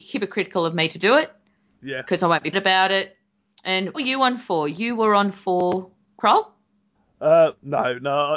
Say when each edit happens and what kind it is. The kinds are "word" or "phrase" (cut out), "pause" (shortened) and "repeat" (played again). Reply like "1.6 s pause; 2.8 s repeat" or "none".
2.5 s word; 3.9 s word